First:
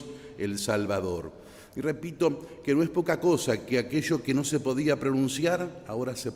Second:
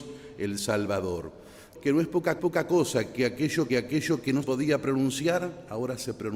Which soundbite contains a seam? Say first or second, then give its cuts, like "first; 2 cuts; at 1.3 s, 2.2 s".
second; 4 cuts; at 1.7 s, 2.4 s, 3.7 s, 4.4 s